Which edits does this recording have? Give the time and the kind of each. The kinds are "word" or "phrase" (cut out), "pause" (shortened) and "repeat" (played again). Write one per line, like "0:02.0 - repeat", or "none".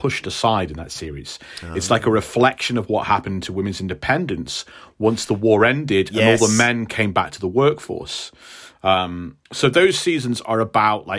0:09.5 - pause